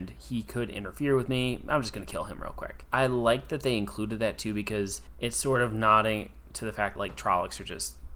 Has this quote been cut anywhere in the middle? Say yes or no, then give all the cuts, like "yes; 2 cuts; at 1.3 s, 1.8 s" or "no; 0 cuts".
yes; 2 cuts; at 2.9 s, 7.0 s